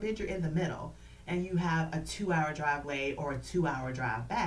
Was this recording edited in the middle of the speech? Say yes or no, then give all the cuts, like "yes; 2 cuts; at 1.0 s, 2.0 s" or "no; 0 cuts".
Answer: yes; 1 cut; at 2.8 s